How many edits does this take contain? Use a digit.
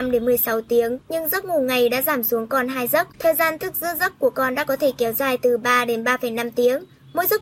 2